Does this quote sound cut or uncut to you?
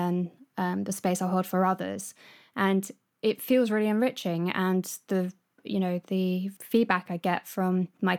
uncut